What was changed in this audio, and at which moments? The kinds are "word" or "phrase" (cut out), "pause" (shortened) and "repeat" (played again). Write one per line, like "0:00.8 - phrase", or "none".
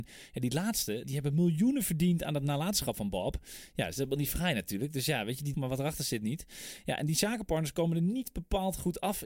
0:01.0 - word
0:05.5 - phrase